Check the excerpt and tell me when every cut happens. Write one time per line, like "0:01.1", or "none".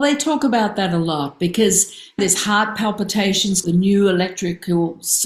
0:02.2
0:03.6